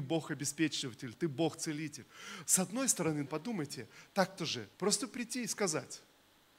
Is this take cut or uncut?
cut